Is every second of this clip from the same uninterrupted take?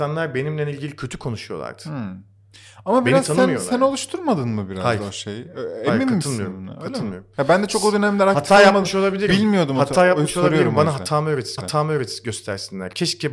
no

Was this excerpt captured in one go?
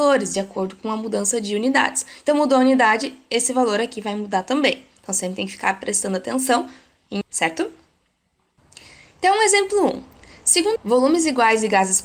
no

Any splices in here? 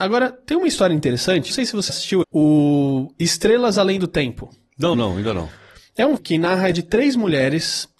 yes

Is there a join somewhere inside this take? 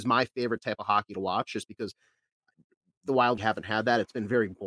yes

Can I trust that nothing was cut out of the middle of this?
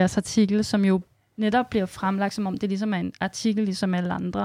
yes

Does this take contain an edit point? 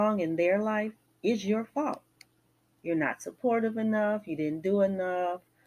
no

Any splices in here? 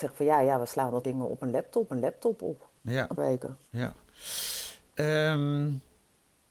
yes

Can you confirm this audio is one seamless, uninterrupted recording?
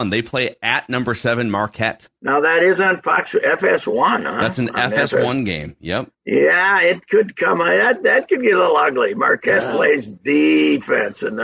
no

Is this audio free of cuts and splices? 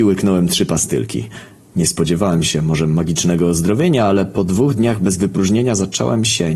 yes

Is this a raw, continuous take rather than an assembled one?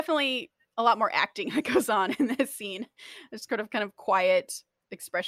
yes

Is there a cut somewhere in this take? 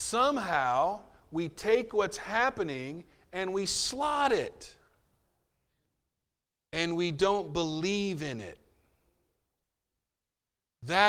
no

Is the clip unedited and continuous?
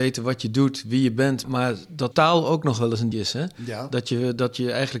no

